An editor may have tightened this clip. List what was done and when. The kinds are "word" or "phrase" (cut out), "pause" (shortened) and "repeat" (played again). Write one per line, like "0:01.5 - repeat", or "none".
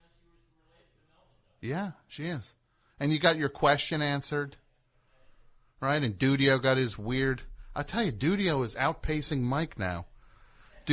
none